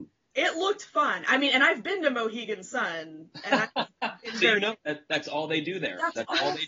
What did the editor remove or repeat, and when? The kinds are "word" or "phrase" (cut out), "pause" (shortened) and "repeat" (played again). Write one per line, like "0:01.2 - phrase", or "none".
none